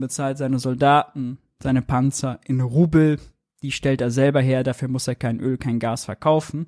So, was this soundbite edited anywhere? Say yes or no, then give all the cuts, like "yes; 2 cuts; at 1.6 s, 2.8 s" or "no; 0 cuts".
no; 0 cuts